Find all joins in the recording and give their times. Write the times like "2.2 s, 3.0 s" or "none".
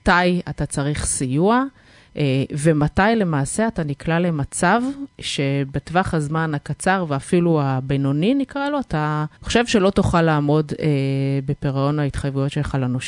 9.4 s